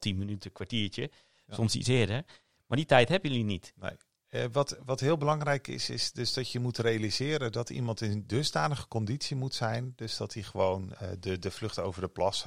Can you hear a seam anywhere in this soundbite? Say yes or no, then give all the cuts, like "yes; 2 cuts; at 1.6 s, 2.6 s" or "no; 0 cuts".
no; 0 cuts